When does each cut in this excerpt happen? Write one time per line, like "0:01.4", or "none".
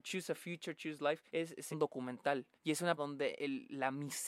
0:01.3
0:01.7
0:02.5
0:03.0
0:03.4